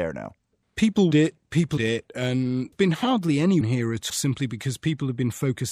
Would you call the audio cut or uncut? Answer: cut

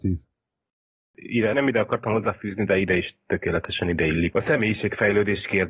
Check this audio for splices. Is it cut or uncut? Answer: cut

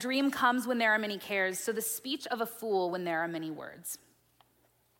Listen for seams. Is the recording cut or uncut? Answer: uncut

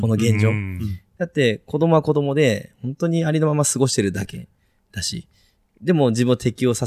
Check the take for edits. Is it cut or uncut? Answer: uncut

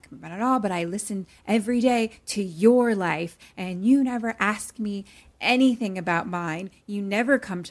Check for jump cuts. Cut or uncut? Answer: uncut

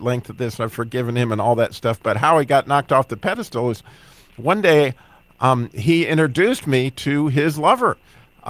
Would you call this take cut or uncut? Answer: uncut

